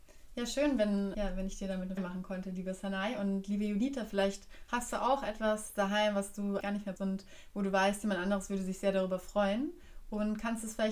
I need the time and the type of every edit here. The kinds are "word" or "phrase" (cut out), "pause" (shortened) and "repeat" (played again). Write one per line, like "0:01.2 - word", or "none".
0:01.1 - word
0:02.0 - word
0:06.6 - word
0:07.0 - word